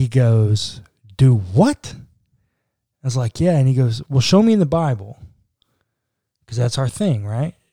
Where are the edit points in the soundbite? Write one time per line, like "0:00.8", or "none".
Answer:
none